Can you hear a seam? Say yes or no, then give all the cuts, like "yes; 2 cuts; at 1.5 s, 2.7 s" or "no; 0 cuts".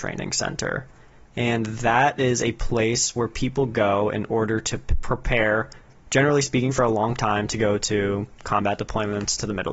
no; 0 cuts